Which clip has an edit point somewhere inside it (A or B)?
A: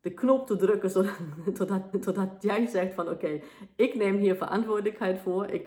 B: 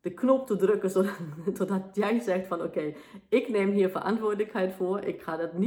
A